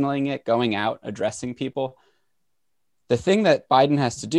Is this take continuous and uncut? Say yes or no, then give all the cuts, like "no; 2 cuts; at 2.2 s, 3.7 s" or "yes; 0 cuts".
yes; 0 cuts